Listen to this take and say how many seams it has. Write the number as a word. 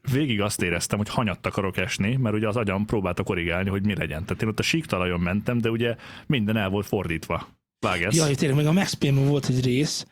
zero